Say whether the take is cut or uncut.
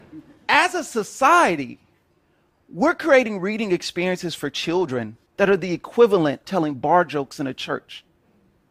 cut